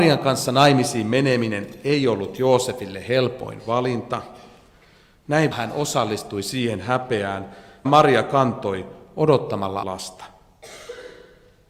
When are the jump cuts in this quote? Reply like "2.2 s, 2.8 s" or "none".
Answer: 5.5 s, 7.8 s, 9.8 s